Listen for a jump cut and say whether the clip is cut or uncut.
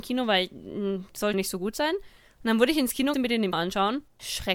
cut